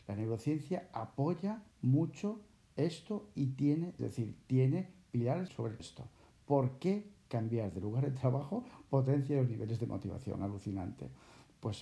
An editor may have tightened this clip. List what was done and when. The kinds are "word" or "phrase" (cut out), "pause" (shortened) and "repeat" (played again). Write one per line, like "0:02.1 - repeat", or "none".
0:01.7 - pause
0:04.0 - phrase
0:05.5 - word
0:05.8 - phrase